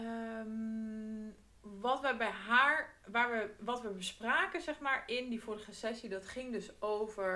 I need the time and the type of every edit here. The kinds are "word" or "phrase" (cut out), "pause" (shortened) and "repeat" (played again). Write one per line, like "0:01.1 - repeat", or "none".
none